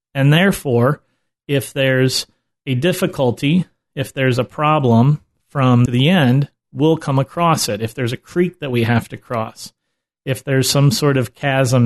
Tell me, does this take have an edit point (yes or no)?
yes